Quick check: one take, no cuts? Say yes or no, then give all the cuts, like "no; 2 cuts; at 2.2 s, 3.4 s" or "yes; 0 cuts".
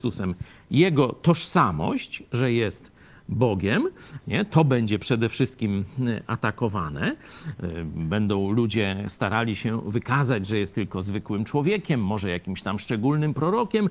yes; 0 cuts